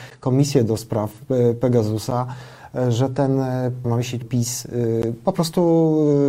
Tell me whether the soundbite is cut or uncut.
cut